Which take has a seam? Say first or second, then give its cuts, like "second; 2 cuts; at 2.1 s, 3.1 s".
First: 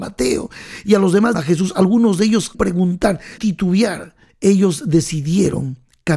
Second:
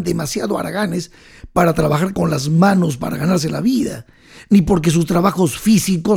first; 4 cuts; at 1.3 s, 2.5 s, 3.4 s, 4.3 s